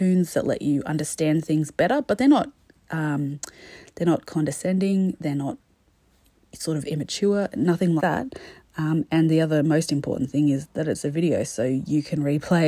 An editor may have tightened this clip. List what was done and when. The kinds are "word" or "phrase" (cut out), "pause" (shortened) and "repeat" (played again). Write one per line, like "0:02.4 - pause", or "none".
0:08.0 - word